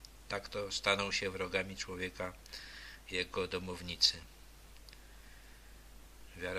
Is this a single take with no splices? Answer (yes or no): yes